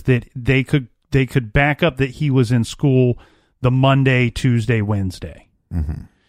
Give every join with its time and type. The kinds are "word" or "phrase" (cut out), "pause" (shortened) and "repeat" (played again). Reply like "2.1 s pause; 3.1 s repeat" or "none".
none